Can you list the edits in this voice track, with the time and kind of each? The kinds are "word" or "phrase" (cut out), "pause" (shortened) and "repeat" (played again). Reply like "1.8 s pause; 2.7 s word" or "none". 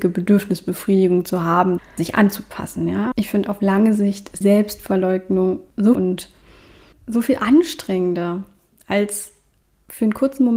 1.8 s phrase; 3.1 s word; 4.4 s word; 5.9 s phrase